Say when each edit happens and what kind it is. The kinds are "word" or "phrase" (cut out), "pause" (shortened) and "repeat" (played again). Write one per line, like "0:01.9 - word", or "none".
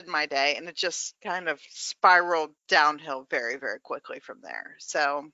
0:01.2 - pause
0:02.6 - pause